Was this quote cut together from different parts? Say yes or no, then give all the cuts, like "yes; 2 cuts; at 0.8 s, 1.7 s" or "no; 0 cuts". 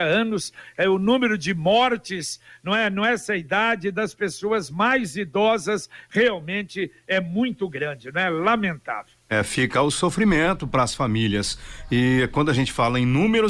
no; 0 cuts